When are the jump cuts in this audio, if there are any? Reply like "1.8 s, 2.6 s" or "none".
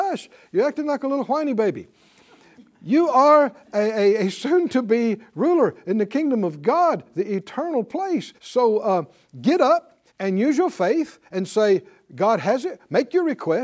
8.4 s, 10.1 s